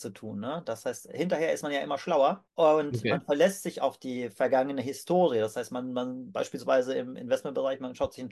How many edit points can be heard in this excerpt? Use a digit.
1